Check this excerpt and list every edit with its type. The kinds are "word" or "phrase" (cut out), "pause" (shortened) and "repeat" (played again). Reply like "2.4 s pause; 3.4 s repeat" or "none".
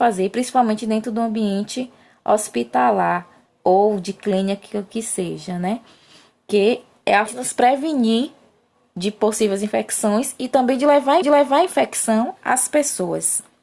7.3 s word; 11.2 s repeat